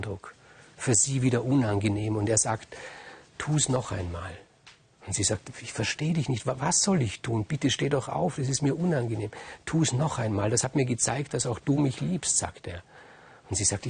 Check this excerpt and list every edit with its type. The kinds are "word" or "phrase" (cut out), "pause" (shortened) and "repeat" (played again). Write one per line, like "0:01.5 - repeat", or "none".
none